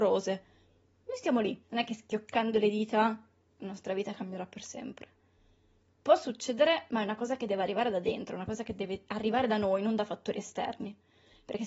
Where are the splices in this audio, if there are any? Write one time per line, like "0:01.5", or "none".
none